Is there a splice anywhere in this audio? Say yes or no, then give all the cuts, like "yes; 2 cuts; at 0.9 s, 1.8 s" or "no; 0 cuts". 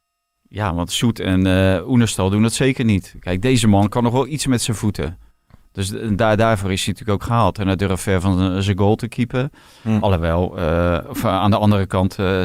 no; 0 cuts